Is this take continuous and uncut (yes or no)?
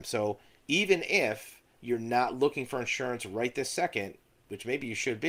yes